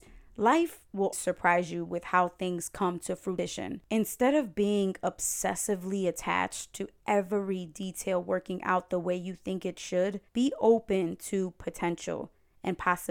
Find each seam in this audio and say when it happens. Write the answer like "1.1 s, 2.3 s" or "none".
1.1 s, 10.3 s